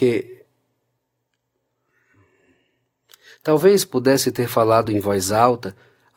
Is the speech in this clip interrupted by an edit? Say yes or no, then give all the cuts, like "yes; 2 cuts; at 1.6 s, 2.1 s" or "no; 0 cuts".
no; 0 cuts